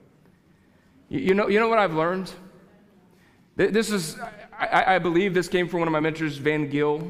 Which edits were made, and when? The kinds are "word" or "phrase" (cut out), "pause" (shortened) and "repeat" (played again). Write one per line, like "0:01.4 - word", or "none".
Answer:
none